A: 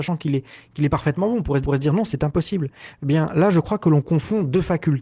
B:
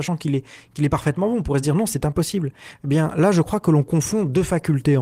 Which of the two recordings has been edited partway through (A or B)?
A